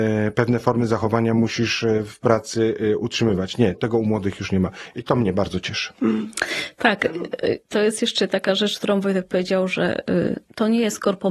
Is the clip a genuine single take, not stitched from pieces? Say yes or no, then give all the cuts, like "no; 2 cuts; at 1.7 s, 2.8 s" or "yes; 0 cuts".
no; 1 cut; at 3.7 s